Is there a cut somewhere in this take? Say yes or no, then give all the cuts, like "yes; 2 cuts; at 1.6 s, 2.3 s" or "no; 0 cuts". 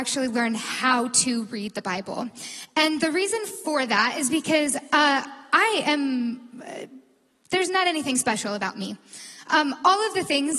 no; 0 cuts